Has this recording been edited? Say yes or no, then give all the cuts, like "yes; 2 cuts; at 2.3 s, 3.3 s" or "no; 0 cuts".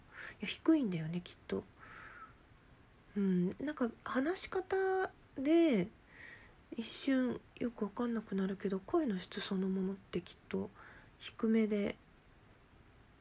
no; 0 cuts